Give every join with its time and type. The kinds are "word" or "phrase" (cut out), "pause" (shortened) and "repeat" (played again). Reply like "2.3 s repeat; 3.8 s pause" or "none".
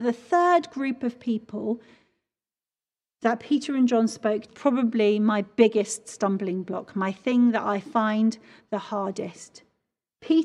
4.5 s phrase